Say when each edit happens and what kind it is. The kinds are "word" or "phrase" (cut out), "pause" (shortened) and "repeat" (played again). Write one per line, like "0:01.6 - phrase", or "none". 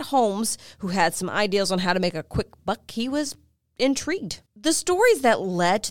0:04.5 - pause